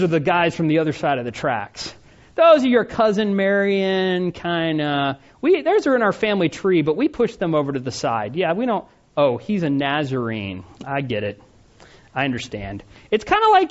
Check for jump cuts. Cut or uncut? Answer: uncut